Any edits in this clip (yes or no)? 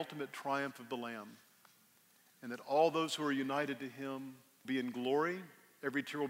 yes